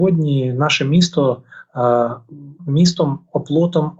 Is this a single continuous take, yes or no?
no